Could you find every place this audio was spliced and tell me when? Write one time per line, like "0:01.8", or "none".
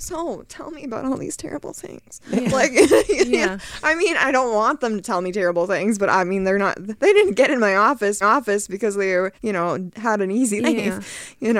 0:08.2
0:09.4
0:10.6